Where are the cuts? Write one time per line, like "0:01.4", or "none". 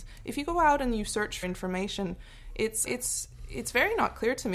0:01.4
0:02.9